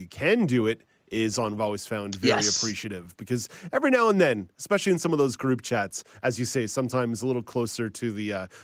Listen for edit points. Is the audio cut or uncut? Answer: cut